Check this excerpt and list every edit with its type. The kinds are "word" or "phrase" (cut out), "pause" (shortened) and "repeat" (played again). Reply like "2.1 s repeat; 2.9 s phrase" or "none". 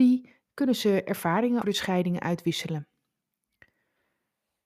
1.6 s word